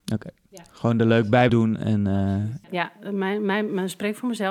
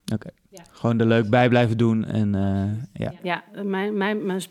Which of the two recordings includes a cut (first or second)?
first